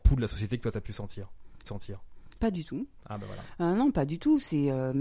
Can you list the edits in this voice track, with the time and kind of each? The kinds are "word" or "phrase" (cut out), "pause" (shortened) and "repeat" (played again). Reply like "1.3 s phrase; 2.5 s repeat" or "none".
1.7 s repeat